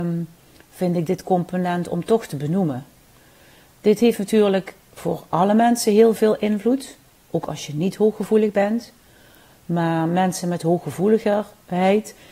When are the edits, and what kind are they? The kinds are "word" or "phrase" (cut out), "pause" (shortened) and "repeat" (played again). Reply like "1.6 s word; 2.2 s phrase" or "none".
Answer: none